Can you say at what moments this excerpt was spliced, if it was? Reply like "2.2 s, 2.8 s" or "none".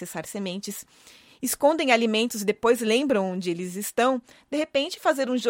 none